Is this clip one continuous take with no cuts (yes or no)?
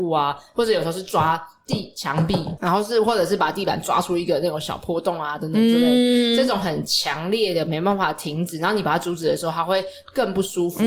no